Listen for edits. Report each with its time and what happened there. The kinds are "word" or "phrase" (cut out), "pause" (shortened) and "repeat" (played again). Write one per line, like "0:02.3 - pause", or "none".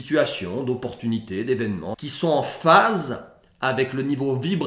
0:01.9 - word